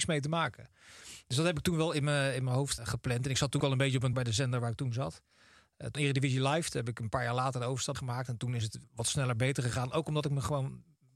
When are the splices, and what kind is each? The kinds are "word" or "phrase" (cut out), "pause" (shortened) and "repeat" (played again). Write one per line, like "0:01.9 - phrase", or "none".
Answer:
0:02.8 - word
0:03.6 - word
0:04.1 - word
0:05.9 - word
0:07.9 - word
0:08.8 - word